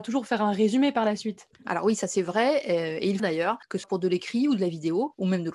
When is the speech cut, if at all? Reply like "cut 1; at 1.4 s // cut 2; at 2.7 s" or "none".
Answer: cut 1; at 1.5 s // cut 2; at 3.2 s // cut 3; at 3.8 s